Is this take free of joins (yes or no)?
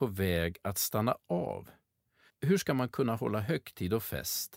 yes